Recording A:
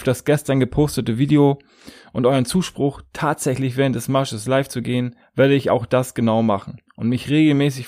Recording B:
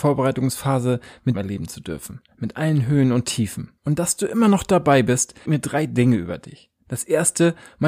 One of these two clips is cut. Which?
B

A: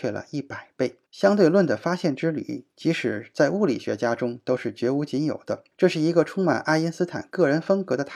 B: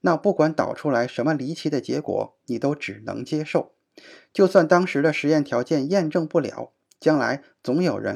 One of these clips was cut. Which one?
A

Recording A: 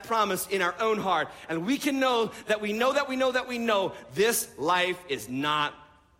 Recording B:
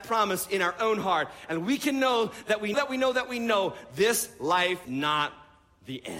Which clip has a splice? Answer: B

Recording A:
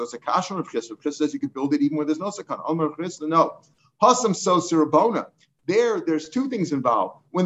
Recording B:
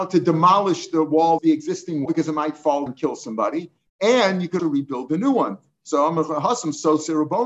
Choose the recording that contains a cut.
B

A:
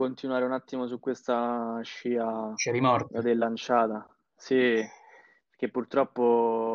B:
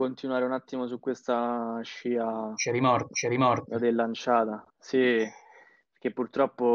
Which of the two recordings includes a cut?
B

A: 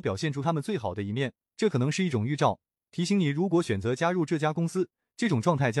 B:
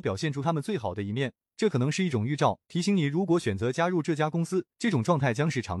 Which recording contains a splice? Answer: B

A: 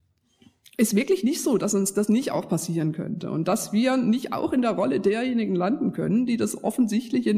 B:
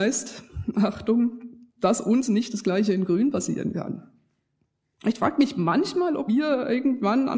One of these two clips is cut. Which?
B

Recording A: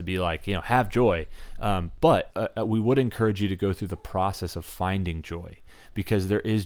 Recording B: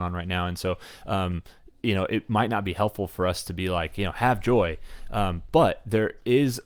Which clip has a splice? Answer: A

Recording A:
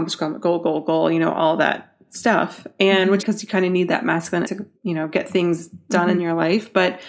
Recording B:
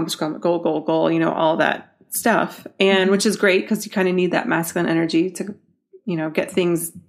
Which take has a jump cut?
A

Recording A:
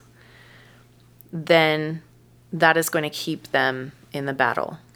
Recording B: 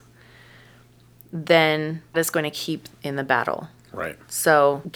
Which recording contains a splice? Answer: B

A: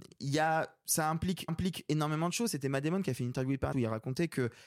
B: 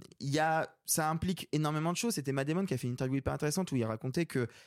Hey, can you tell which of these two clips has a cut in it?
A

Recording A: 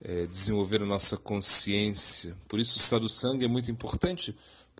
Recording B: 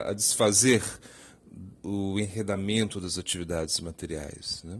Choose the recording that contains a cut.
B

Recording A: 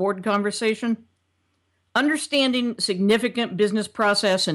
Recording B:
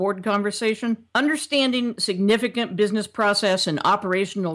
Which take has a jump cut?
B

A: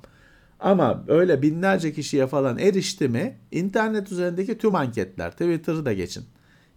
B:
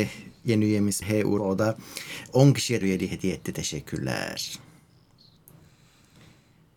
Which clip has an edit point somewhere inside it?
B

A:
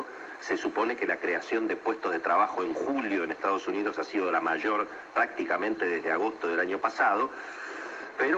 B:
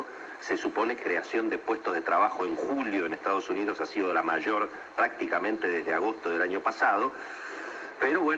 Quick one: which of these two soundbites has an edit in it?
B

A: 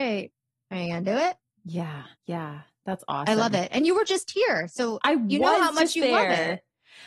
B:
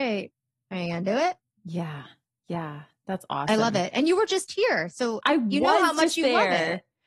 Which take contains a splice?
A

